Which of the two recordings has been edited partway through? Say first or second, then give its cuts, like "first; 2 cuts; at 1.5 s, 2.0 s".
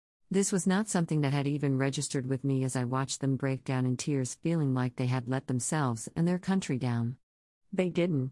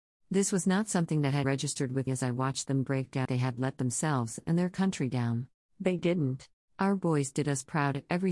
second; 5 cuts; at 1.4 s, 2.1 s, 3.2 s, 5.7 s, 6.6 s